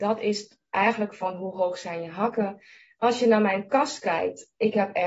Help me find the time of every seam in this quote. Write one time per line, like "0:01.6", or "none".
none